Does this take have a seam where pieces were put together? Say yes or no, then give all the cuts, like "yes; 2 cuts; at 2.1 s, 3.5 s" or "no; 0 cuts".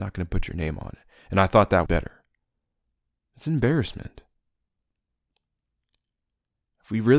yes; 1 cut; at 1.9 s